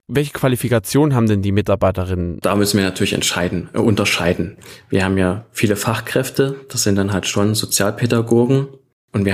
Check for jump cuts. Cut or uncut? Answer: uncut